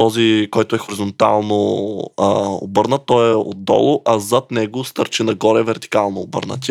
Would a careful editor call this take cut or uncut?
uncut